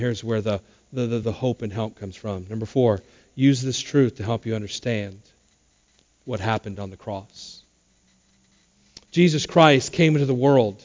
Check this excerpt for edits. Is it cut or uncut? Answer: uncut